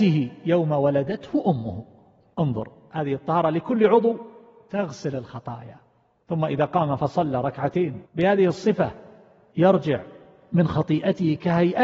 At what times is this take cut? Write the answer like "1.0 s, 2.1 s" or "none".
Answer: 8.0 s